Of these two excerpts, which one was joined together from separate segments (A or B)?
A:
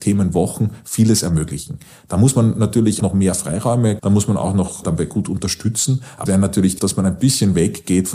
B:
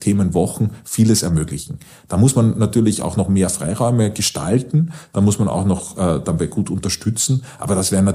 A